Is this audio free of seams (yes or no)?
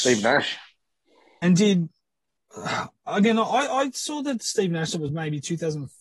yes